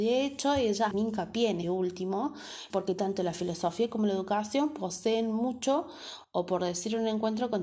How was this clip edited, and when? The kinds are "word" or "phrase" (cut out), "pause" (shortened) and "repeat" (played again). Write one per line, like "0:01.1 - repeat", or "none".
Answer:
0:00.9 - word
0:01.6 - word
0:02.7 - word